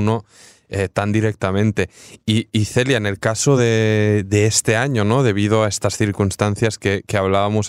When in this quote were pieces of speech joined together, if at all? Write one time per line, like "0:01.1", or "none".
none